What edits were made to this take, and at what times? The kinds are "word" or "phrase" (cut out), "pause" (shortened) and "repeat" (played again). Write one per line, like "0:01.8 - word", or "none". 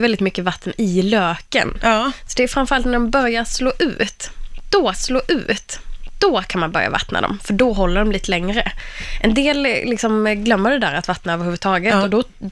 0:04.9 - repeat

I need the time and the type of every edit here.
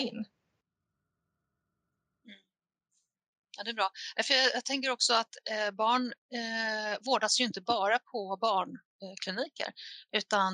none

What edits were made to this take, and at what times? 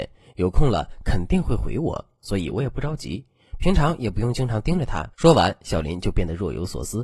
0:05.1 - pause

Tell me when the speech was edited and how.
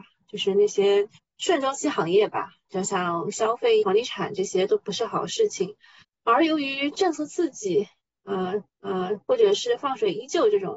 0:01.2 - pause
0:03.8 - phrase
0:06.0 - pause
0:08.7 - repeat

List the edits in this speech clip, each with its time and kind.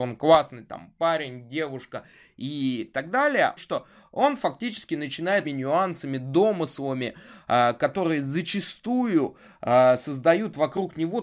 0:03.6 - word
0:05.4 - phrase

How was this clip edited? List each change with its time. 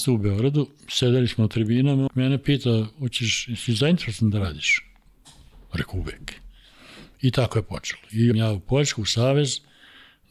0:02.1 - word
0:08.3 - word

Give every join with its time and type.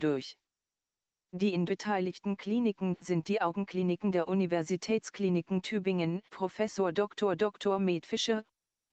0:01.7 - word
0:06.3 - pause

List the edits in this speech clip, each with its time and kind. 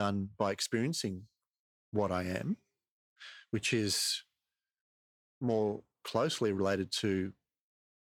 none

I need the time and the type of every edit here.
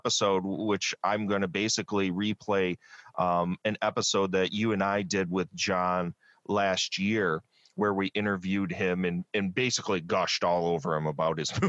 none

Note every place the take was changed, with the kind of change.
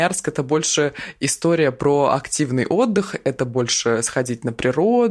none

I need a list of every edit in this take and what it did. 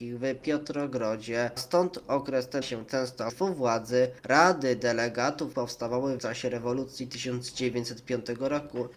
0:01.6 - word
0:02.6 - word
0:03.3 - word
0:05.5 - word
0:06.2 - word

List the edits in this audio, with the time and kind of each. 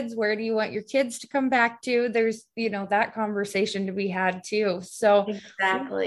none

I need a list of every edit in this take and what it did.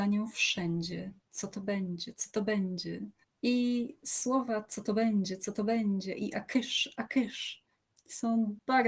0:01.2 - pause
0:03.2 - pause

